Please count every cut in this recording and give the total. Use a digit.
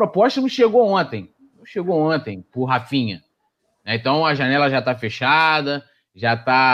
0